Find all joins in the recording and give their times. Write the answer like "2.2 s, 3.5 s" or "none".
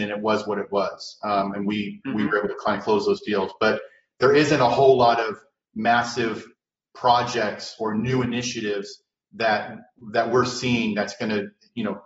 none